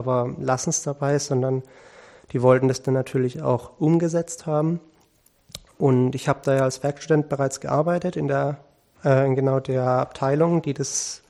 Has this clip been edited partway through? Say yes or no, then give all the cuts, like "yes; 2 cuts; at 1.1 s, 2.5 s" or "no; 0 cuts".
no; 0 cuts